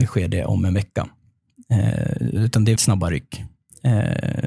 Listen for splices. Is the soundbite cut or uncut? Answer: cut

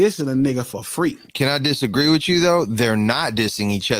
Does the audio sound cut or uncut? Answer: uncut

